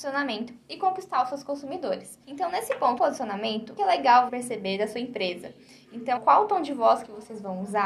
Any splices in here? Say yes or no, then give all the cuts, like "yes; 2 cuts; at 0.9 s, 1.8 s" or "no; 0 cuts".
yes; 5 cuts; at 2.2 s, 3.0 s, 3.8 s, 4.3 s, 6.2 s